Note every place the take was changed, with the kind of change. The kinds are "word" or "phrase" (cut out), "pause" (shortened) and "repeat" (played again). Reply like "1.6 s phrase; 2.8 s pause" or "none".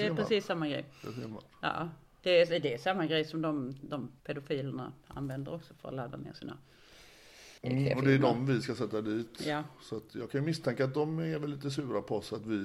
4.2 s pause; 7.6 s pause